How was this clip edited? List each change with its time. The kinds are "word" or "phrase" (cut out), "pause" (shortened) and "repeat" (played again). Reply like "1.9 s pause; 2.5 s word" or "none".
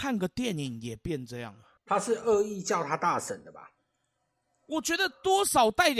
1.8 s pause